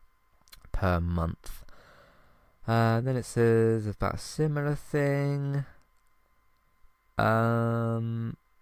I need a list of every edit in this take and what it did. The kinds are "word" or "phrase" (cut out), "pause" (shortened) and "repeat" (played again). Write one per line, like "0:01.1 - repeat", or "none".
none